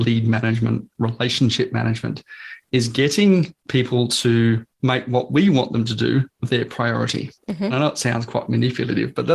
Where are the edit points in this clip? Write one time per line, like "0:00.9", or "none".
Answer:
0:03.6
0:04.7
0:07.4